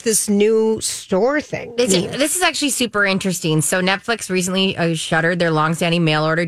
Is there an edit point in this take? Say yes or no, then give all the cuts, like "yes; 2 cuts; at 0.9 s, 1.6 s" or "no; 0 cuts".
no; 0 cuts